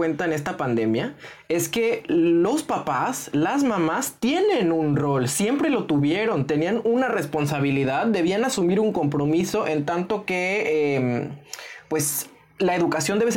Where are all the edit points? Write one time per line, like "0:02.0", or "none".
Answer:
none